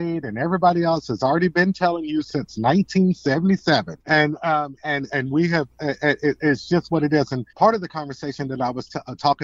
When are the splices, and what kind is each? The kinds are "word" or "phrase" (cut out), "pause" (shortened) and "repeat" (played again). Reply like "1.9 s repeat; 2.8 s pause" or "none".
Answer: 4.0 s pause; 7.5 s pause